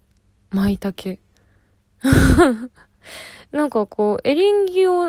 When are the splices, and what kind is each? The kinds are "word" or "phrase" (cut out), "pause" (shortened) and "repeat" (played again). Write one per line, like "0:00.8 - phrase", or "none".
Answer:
none